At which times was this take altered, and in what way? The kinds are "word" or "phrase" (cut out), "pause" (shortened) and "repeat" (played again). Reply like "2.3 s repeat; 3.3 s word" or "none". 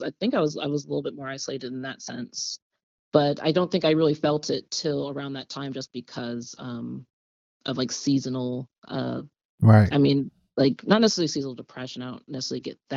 none